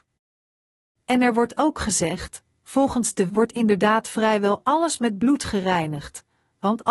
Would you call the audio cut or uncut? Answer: cut